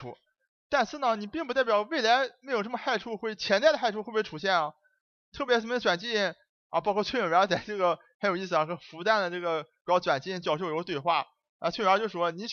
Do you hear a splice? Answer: no; 0 cuts

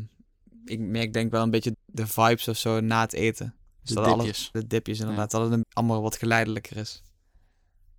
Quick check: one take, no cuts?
no; 3 cuts; at 1.7 s, 4.5 s, 5.6 s

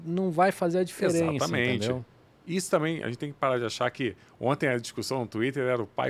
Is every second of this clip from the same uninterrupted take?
yes; 0 cuts

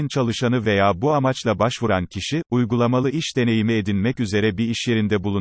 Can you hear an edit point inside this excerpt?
no; 0 cuts

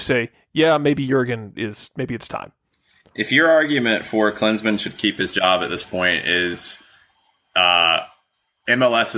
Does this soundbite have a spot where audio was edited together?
no; 0 cuts

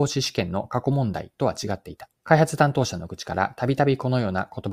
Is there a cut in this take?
yes; 1 cut; at 2.1 s

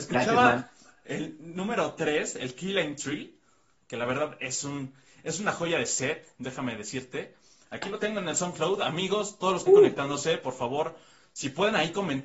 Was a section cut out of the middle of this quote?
yes; 1 cut; at 9.7 s

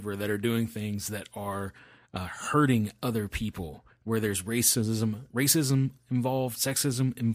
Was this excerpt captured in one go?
yes; 0 cuts

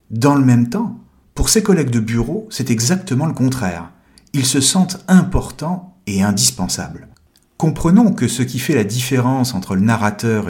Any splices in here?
no; 0 cuts

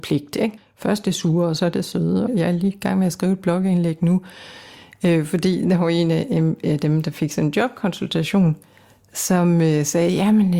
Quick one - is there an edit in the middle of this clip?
no; 0 cuts

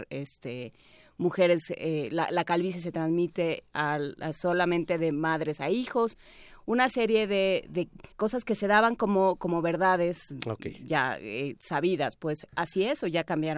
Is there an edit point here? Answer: yes; 3 cuts; at 3.7 s, 8.1 s, 12.5 s

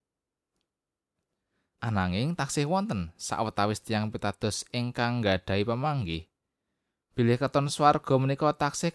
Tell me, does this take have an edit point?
no; 0 cuts

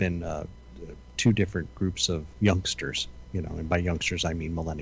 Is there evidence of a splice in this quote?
yes; 1 cut; at 2.3 s

